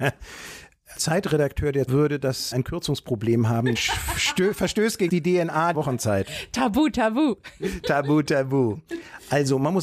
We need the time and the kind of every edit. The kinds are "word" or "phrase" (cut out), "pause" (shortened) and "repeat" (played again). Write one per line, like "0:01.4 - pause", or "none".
0:01.0 - word
0:01.9 - word
0:02.5 - word
0:03.8 - word
0:05.1 - word
0:05.7 - word